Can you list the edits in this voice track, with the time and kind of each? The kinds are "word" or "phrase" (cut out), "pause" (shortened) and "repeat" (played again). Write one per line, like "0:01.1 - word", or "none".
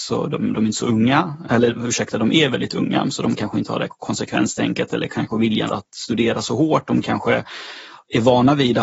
0:05.7 - word